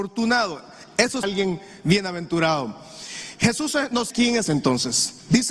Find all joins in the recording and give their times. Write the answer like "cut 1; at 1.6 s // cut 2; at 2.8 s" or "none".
cut 1; at 1.2 s // cut 2; at 4.1 s // cut 3; at 4.5 s